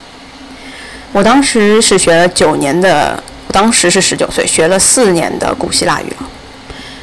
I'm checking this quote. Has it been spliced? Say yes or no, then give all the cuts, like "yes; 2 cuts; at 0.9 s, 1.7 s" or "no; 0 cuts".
yes; 1 cut; at 3.5 s